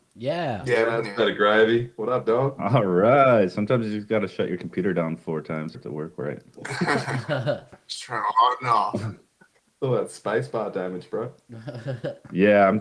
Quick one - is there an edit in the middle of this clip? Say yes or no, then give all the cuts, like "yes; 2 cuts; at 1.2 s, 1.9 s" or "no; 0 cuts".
yes; 1 cut; at 5.7 s